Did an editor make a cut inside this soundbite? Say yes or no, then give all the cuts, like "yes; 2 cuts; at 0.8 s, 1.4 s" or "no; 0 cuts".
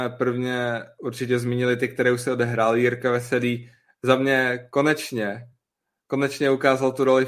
no; 0 cuts